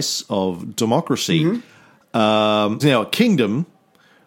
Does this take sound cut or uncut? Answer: cut